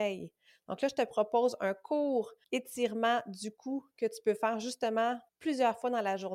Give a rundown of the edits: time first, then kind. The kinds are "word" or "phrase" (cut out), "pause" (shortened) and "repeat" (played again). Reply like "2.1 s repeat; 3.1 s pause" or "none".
2.4 s pause; 5.3 s pause